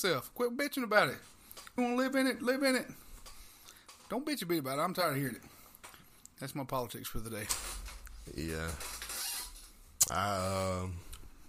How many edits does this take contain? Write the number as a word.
one